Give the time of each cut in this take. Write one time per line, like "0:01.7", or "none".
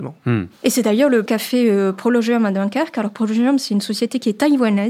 0:01.3